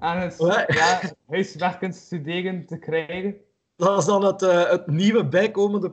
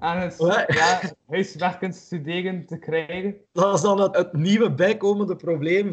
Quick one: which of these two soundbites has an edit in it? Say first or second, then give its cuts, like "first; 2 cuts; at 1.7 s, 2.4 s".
second; 2 cuts; at 3.4 s, 4.1 s